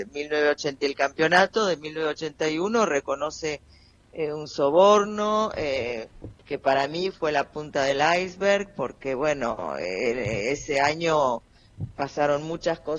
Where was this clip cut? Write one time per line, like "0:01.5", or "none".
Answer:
none